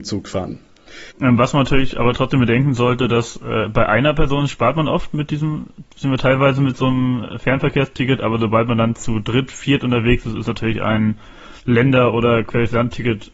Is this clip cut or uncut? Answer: cut